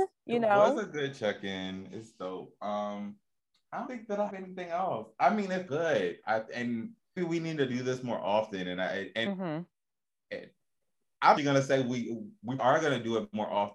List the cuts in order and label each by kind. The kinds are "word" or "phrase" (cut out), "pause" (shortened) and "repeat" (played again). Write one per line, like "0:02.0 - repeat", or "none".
0:03.9 - word
0:04.3 - word
0:05.7 - word
0:07.2 - word
0:09.3 - word
0:11.4 - word
0:12.6 - word